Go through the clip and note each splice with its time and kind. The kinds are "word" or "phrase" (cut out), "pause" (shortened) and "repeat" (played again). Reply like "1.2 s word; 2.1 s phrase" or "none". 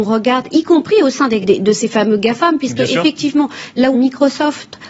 1.4 s word; 3.9 s word